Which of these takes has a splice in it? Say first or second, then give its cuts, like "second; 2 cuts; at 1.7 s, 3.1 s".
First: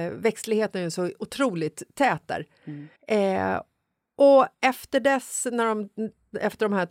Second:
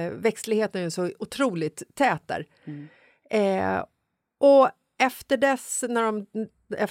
first; 2 cuts; at 3.0 s, 4.5 s